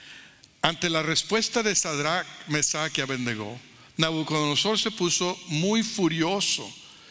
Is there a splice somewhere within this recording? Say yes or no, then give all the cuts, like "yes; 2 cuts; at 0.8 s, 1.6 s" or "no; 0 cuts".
no; 0 cuts